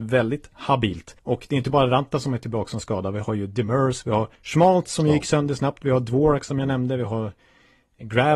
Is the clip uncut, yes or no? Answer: no